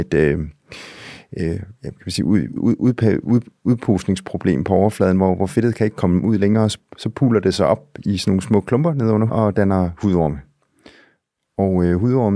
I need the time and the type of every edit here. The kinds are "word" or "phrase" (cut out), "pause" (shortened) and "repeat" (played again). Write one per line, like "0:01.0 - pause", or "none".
0:02.6 - word
0:03.2 - word
0:09.3 - word